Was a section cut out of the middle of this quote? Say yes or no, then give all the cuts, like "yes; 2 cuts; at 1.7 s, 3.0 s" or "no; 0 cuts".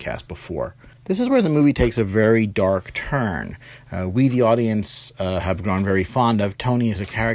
yes; 1 cut; at 1.0 s